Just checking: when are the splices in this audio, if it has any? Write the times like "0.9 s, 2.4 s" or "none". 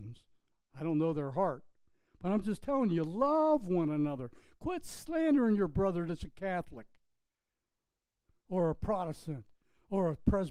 none